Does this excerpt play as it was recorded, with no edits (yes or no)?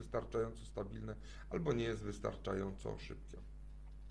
yes